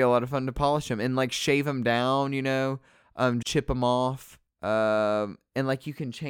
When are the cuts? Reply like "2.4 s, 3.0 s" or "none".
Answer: 3.4 s, 4.5 s